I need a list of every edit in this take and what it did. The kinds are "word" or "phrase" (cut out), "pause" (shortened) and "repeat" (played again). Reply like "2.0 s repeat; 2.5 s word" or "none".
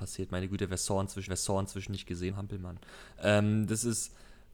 1.3 s repeat; 2.3 s phrase